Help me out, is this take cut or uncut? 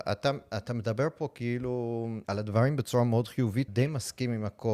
cut